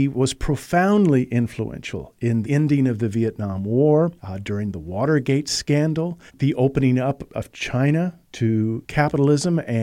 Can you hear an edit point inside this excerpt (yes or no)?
yes